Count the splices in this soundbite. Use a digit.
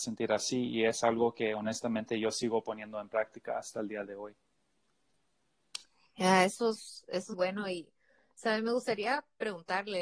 1